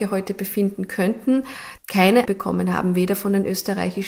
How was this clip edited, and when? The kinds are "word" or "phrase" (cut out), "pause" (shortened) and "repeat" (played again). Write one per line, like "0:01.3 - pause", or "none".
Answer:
0:02.3 - word